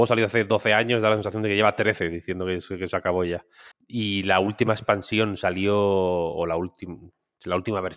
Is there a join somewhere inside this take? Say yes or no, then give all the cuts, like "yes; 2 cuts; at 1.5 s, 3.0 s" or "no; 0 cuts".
yes; 1 cut; at 3.7 s